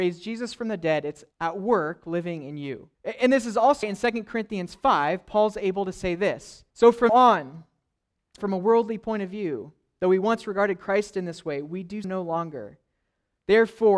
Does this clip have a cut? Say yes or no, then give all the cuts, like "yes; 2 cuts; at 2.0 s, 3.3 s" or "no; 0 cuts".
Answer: yes; 7 cuts; at 1.3 s, 2.9 s, 3.8 s, 6.7 s, 7.1 s, 8.4 s, 12.0 s